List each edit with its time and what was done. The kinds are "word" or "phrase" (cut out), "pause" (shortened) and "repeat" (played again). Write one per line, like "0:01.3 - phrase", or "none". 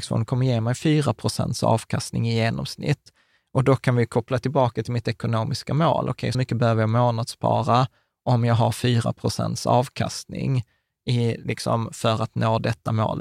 0:06.3 - phrase